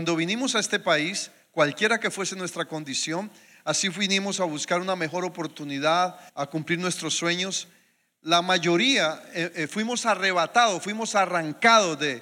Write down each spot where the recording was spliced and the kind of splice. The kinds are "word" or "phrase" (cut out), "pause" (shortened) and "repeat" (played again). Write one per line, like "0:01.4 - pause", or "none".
0:06.3 - pause